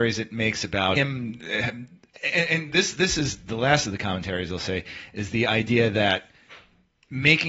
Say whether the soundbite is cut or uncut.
uncut